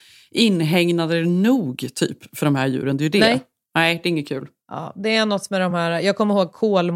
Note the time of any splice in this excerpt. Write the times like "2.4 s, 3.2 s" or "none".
none